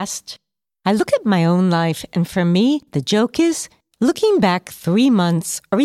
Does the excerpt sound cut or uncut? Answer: uncut